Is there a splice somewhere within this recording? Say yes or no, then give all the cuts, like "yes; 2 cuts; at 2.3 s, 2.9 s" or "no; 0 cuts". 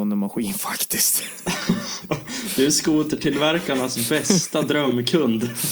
no; 0 cuts